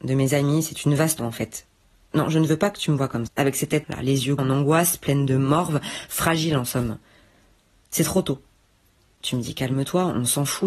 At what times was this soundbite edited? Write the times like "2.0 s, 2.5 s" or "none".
1.2 s, 3.3 s, 3.8 s, 4.4 s